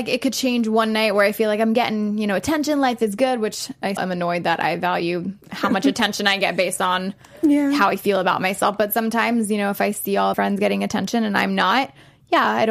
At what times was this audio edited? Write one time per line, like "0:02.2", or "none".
0:04.0
0:05.4
0:10.3